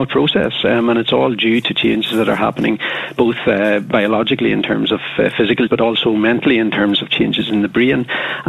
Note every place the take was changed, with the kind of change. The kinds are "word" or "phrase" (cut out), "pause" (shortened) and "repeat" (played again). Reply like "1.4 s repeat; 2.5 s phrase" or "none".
5.7 s word